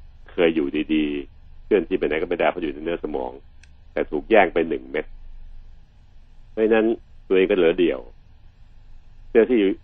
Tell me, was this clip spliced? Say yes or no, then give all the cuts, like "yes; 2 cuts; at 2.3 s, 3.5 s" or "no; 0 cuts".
no; 0 cuts